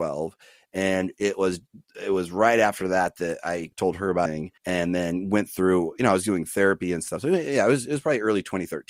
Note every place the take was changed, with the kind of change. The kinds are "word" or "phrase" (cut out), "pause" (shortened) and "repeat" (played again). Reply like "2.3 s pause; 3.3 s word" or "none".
4.6 s pause